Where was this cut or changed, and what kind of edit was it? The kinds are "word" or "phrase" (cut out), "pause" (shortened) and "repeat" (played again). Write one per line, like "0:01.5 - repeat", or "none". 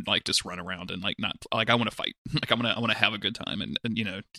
none